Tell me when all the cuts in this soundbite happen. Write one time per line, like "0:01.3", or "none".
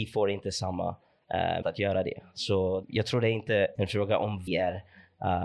0:01.6
0:02.8
0:03.7
0:04.5